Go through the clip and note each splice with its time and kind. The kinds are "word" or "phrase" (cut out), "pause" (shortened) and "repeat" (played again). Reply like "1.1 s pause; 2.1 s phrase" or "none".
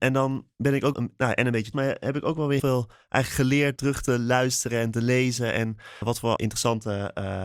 0.9 s word; 1.7 s word; 2.6 s word; 3.8 s word; 6.0 s word; 6.4 s word